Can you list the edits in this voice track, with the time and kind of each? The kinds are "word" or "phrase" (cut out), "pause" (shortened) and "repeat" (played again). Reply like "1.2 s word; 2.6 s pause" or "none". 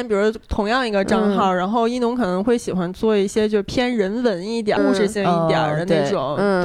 4.8 s word

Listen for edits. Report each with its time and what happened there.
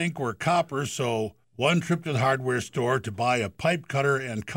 1.4 s pause

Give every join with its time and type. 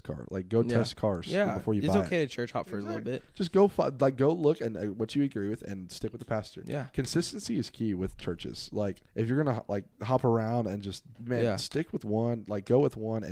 9.1 s pause; 9.9 s pause; 11.1 s pause

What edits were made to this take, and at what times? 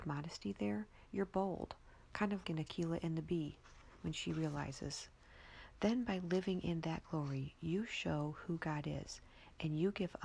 2.4 s word

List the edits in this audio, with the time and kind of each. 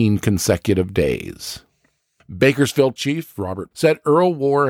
3.0 s word; 3.7 s word

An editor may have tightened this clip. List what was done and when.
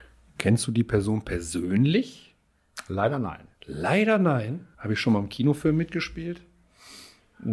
3.5 s pause; 4.7 s pause

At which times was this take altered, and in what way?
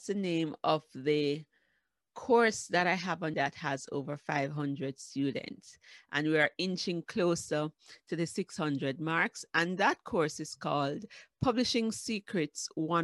3.3 s word

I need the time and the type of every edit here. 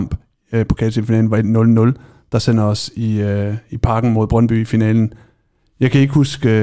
none

